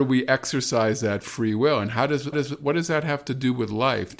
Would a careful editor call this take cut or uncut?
cut